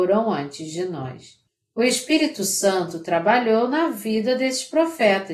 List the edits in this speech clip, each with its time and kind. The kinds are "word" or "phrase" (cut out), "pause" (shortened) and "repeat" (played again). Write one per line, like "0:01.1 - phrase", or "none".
0:01.5 - pause